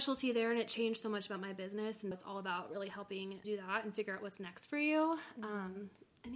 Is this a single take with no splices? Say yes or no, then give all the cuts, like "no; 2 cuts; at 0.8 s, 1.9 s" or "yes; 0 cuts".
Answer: no; 2 cuts; at 2.1 s, 3.4 s